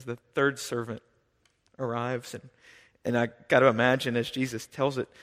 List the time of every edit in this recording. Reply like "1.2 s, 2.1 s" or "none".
none